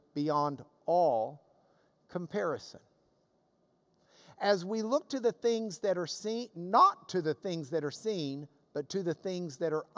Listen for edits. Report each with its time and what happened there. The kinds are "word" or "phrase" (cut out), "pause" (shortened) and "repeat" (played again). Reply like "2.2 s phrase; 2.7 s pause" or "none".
none